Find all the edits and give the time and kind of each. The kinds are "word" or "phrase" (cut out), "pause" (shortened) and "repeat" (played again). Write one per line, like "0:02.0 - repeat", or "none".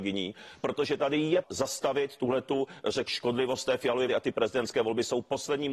0:01.4 - word
0:03.1 - word
0:04.1 - word